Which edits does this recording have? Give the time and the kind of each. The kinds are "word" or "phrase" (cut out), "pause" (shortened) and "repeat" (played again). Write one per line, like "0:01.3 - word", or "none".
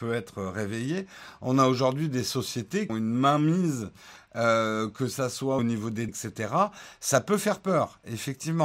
0:02.9 - phrase
0:05.6 - phrase
0:06.1 - word